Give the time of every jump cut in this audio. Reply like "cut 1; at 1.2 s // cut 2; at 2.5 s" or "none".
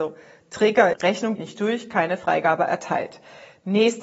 cut 1; at 0.9 s // cut 2; at 1.4 s